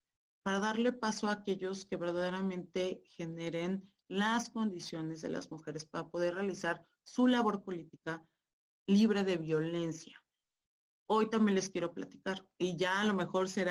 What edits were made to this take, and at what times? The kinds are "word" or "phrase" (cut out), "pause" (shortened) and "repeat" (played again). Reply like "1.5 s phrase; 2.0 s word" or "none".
none

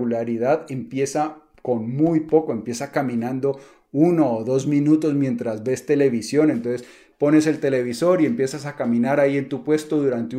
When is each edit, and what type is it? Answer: none

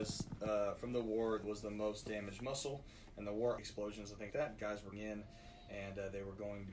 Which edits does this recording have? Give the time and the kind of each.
1.4 s word; 3.6 s word; 4.3 s word; 4.9 s word

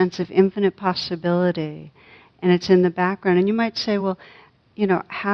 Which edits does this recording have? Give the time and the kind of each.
none

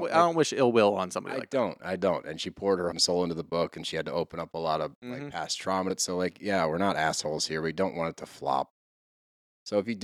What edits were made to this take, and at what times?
2.9 s word; 5.9 s phrase

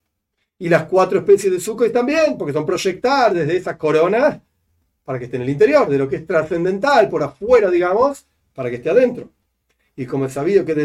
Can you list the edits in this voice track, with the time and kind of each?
none

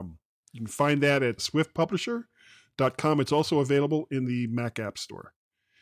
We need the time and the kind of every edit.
1.4 s word

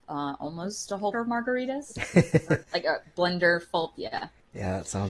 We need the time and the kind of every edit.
1.1 s word; 2.6 s word

